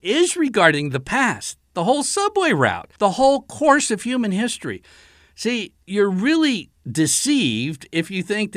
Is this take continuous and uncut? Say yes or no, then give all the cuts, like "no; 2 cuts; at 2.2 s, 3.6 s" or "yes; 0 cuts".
no; 2 cuts; at 3.0 s, 5.8 s